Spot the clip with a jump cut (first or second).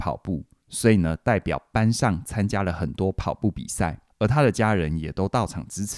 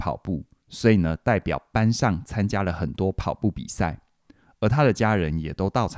first